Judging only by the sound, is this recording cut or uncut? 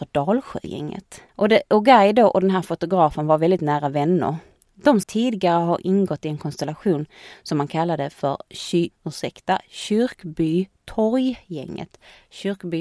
cut